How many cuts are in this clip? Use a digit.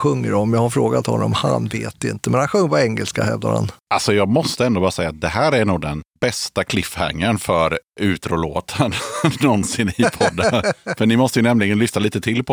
0